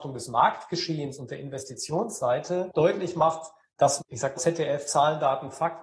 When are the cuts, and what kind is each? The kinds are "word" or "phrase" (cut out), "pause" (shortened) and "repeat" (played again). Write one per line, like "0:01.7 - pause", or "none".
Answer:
0:02.7 - word
0:04.0 - word
0:04.3 - word